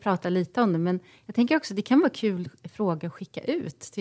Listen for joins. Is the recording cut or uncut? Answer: uncut